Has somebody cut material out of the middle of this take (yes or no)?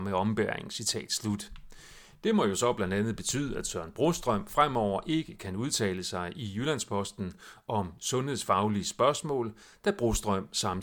no